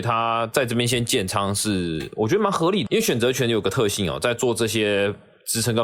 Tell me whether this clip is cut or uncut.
cut